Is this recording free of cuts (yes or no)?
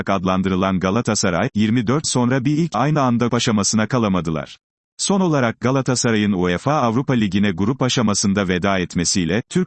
no